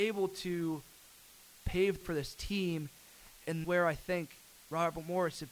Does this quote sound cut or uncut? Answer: cut